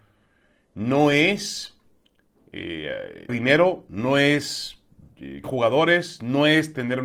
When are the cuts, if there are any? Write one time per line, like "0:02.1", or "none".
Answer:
0:03.3
0:05.4